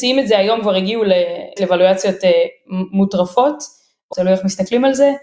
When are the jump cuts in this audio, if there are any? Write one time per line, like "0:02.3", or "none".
0:01.6
0:04.1